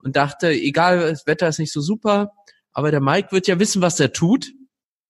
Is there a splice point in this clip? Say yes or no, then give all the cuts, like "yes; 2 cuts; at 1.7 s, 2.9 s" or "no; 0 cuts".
no; 0 cuts